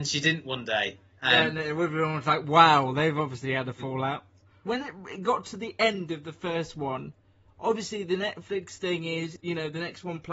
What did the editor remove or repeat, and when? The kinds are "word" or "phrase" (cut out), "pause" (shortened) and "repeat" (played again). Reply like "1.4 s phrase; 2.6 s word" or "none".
none